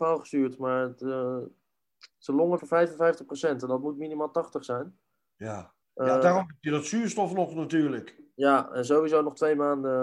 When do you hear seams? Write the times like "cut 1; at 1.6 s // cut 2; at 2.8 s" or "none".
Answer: cut 1; at 2.1 s // cut 2; at 2.6 s // cut 3; at 5.8 s